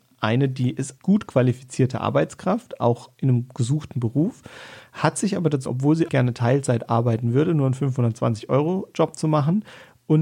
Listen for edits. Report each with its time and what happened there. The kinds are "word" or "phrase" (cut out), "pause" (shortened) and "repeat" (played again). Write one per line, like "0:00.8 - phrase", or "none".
0:01.0 - word
0:05.7 - word
0:06.1 - word